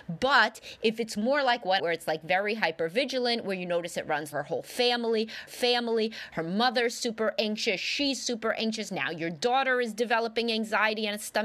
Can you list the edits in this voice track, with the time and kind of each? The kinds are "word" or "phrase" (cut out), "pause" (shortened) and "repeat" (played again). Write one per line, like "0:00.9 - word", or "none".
0:01.8 - phrase
0:04.3 - word
0:05.5 - repeat